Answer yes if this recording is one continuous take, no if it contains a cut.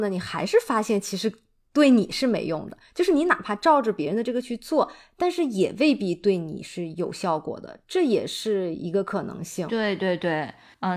yes